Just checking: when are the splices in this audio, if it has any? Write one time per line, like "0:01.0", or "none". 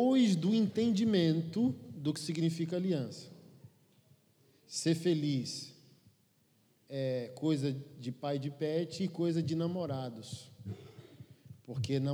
none

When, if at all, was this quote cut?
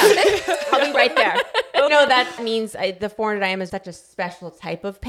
0:01.9
0:02.4
0:03.7

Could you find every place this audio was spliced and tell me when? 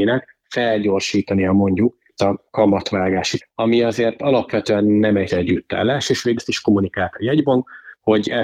0:02.2
0:03.4
0:05.3
0:06.4

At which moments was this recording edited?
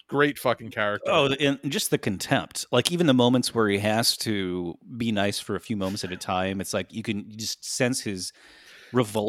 none

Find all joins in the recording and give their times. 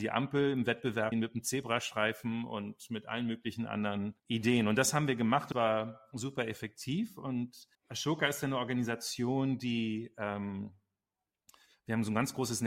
0:01.1
0:04.2
0:05.5
0:07.7

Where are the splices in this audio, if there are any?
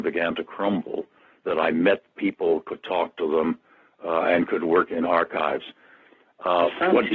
none

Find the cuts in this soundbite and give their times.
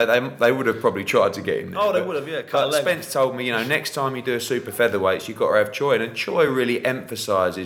none

